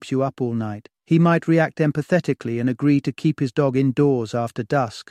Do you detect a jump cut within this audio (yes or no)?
yes